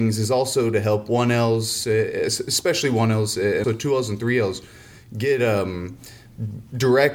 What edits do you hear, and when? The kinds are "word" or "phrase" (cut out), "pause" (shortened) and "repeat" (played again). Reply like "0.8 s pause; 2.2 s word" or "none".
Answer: 3.6 s word